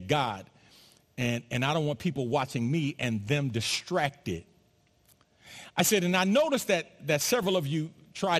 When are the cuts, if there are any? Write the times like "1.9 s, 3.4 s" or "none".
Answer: 7.0 s